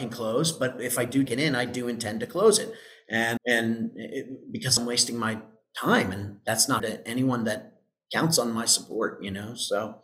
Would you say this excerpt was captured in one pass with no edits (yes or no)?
no